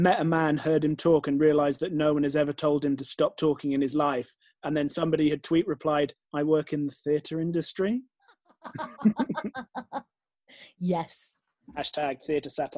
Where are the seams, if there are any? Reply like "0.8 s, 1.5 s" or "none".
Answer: 6.2 s